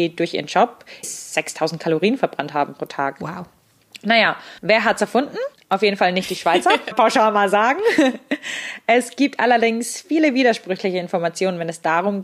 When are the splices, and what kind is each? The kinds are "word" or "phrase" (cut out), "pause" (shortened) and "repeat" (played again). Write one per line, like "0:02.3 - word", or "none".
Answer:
0:01.0 - word
0:04.6 - pause
0:05.6 - pause
0:06.9 - phrase